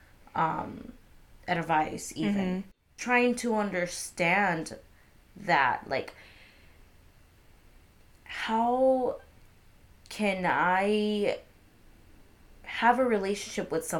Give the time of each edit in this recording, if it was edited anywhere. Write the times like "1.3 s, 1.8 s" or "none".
none

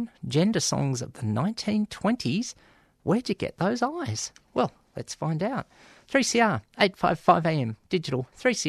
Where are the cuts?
none

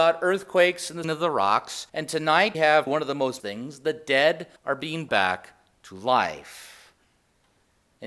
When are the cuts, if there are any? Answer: 1.0 s, 1.9 s, 2.5 s, 2.9 s, 3.4 s, 4.6 s, 5.1 s

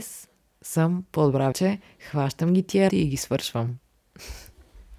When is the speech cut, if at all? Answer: 1.5 s, 2.9 s

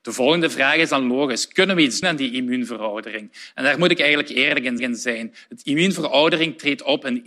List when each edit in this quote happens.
2.0 s, 4.8 s

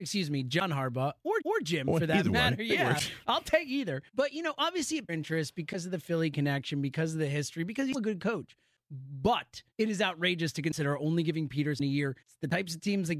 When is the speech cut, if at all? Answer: 1.4 s, 4.1 s, 5.1 s, 7.9 s, 9.7 s, 12.2 s

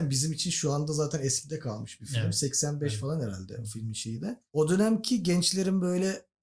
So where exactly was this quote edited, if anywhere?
4.5 s

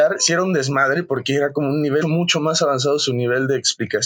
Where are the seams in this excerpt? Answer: 2.0 s

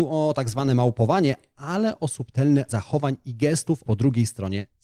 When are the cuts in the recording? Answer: 2.7 s, 3.8 s

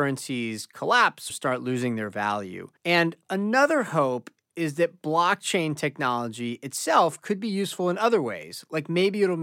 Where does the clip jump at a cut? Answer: 1.3 s, 2.8 s

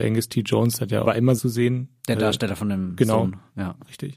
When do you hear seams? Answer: 1.0 s, 1.4 s

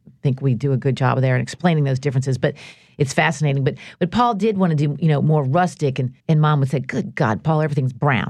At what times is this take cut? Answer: 6.2 s

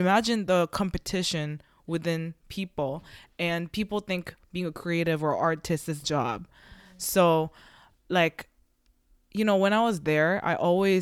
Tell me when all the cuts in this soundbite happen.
6.0 s

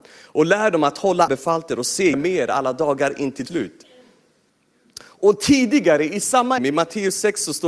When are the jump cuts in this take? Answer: 1.3 s, 2.1 s, 3.5 s, 6.6 s

